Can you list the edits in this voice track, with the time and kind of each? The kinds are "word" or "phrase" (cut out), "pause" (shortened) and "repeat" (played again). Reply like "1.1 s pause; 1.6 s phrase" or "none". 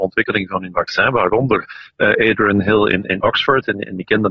none